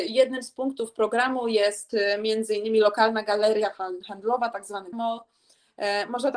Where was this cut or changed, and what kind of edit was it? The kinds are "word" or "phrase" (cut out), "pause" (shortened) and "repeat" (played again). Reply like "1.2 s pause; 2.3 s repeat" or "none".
4.9 s word